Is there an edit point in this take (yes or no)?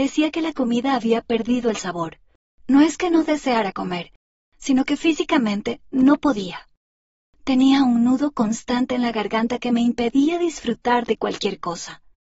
no